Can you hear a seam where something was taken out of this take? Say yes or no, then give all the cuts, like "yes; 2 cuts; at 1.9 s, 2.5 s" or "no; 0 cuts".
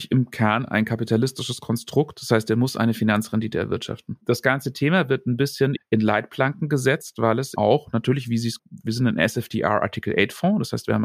yes; 3 cuts; at 5.8 s, 7.6 s, 8.6 s